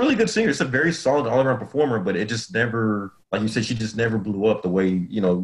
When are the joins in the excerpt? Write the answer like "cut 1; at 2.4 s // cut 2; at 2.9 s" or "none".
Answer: cut 1; at 3.2 s